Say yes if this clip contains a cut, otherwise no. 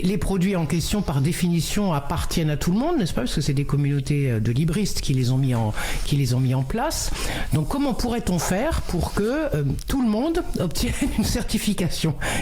no